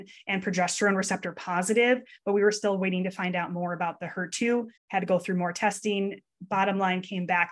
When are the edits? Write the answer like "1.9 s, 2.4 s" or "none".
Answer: 4.8 s